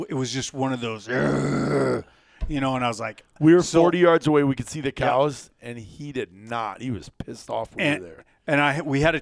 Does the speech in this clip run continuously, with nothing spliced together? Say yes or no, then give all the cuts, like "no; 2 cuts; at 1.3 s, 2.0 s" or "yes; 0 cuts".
yes; 0 cuts